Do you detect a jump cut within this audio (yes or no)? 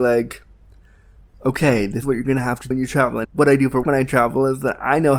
yes